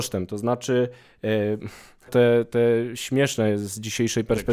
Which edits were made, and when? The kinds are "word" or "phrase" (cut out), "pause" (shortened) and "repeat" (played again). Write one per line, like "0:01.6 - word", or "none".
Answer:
0:02.1 - phrase